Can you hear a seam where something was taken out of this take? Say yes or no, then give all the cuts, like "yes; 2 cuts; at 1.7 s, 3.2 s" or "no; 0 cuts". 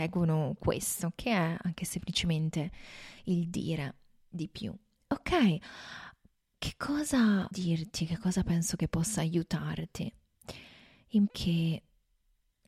yes; 3 cuts; at 6.5 s, 7.5 s, 11.3 s